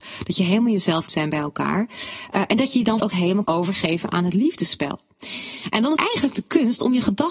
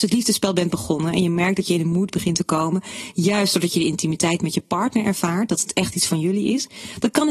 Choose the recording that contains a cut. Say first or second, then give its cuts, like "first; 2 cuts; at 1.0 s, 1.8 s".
first; 4 cuts; at 1.1 s, 3.0 s, 3.4 s, 6.0 s